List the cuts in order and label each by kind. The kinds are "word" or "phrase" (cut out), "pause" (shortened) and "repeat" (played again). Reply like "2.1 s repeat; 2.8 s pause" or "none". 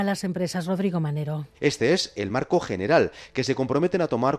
none